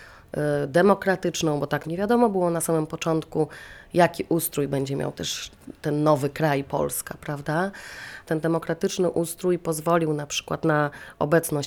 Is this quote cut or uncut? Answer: cut